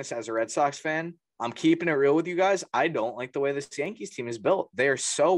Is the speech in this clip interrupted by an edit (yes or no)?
no